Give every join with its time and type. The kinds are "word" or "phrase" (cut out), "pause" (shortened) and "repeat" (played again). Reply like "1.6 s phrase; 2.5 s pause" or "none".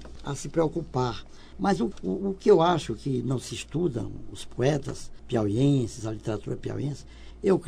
none